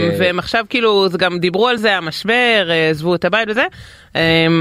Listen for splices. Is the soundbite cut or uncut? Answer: uncut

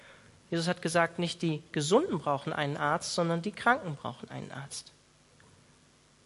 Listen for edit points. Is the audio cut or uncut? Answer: uncut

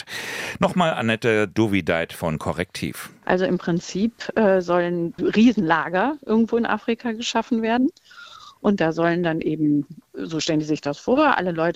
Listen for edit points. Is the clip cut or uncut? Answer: uncut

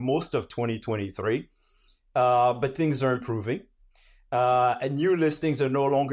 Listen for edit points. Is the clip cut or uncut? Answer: uncut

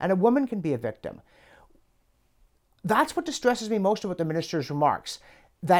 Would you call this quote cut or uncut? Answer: uncut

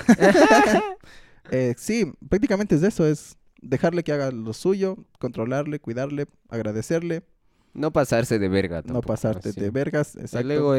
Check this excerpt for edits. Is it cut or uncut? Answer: uncut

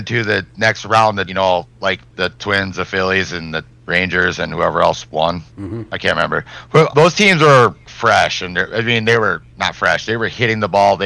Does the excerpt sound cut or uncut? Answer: cut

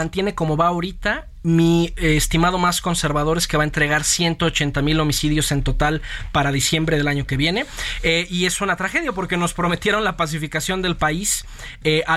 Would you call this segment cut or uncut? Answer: uncut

